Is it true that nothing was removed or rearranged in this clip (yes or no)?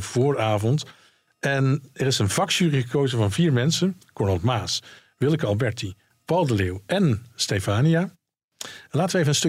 yes